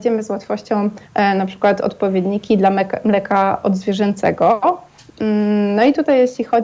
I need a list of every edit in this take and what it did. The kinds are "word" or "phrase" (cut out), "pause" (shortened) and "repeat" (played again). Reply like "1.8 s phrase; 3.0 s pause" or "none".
1.1 s pause